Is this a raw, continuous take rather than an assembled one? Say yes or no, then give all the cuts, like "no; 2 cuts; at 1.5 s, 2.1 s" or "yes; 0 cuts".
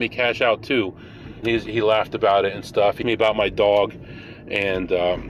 no; 2 cuts; at 1.4 s, 3.0 s